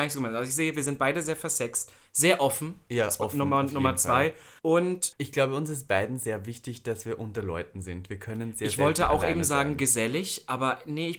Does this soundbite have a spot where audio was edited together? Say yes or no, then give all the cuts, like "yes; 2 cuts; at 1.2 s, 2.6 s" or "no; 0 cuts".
yes; 1 cut; at 4.6 s